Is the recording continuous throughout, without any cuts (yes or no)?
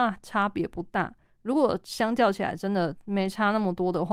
yes